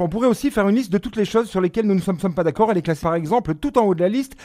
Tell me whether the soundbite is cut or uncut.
cut